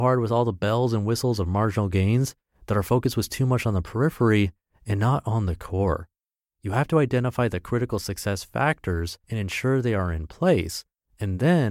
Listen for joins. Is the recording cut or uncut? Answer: cut